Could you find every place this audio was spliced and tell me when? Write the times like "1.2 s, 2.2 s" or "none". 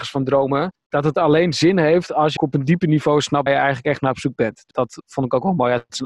2.4 s, 3.5 s, 4.7 s